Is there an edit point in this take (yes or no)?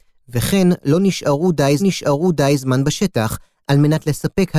yes